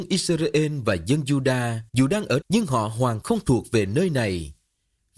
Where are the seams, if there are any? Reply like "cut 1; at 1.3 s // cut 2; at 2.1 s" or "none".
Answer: cut 1; at 1.9 s // cut 2; at 2.4 s // cut 3; at 3.2 s